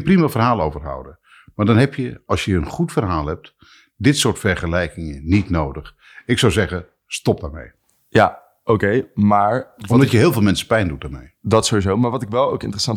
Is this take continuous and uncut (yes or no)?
yes